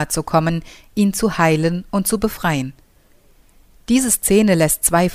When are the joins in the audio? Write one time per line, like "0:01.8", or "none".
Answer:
none